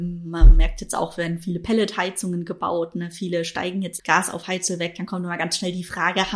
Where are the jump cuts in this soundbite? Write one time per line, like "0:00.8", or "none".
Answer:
0:04.0